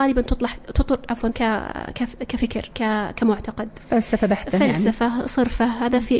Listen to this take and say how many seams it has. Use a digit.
2